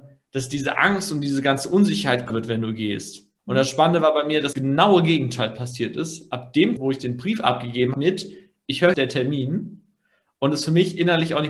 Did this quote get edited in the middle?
yes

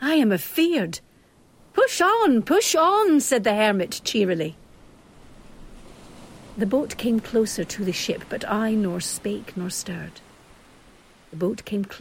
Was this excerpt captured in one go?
yes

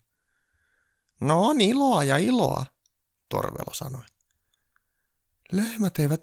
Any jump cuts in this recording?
no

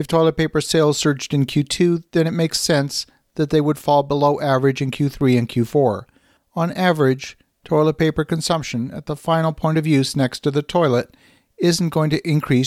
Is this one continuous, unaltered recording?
yes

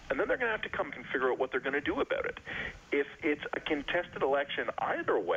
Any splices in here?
yes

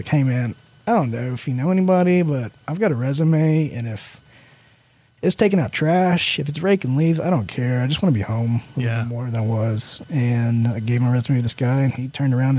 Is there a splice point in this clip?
no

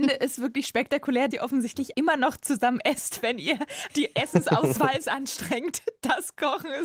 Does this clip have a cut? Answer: yes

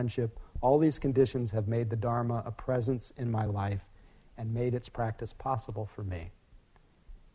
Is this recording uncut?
yes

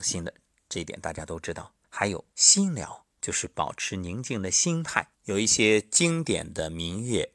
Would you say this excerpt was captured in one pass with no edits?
no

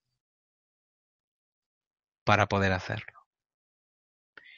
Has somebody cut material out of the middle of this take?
no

